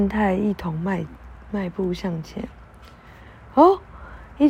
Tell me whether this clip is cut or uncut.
uncut